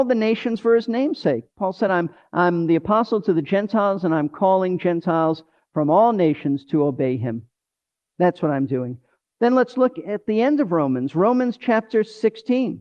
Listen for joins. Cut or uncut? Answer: uncut